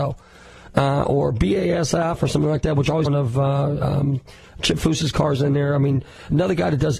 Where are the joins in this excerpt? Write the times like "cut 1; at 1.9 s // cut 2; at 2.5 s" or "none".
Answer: cut 1; at 3.1 s